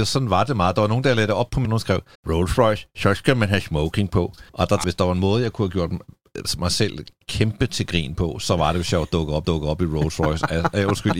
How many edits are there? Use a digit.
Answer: 5